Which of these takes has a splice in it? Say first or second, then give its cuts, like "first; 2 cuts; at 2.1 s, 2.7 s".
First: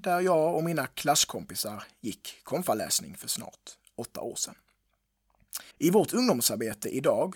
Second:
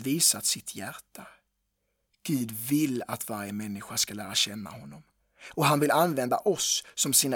first; 1 cut; at 5.7 s